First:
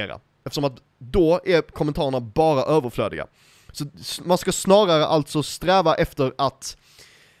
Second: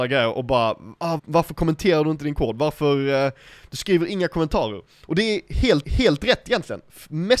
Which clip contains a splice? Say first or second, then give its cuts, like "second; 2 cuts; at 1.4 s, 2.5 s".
second; 2 cuts; at 1.2 s, 5.8 s